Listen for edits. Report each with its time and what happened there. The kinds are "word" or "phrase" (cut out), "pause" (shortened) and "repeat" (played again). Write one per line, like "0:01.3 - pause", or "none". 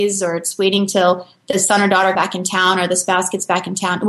0:02.2 - word

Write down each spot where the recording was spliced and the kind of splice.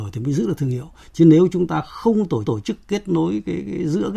0:02.4 - repeat

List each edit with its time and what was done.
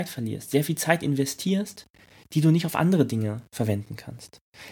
none

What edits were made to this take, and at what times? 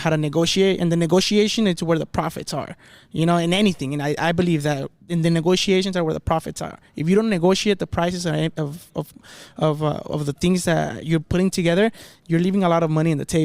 none

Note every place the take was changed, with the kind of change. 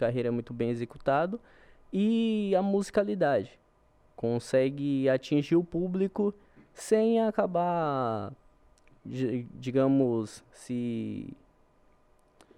none

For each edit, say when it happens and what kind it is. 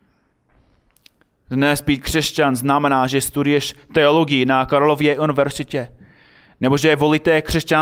none

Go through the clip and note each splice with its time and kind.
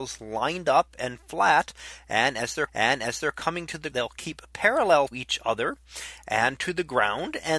0:02.7 - repeat
0:03.9 - word
0:05.1 - word

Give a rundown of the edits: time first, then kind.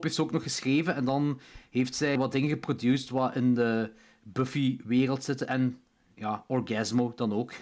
0:02.2 - word

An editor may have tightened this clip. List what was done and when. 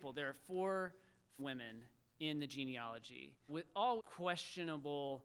0:01.4 - word
0:03.5 - word
0:04.0 - word

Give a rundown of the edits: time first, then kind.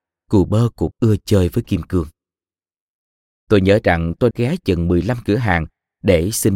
0:00.9 - word
0:04.3 - word

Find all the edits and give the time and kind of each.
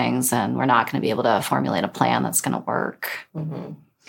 none

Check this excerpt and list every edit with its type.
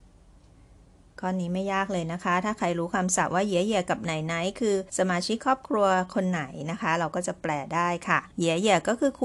0:04.9 - pause
0:08.3 - pause

